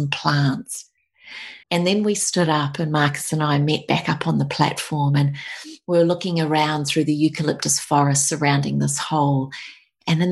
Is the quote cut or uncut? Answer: cut